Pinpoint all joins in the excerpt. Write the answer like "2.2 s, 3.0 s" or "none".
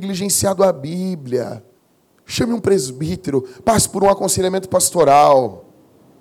1.8 s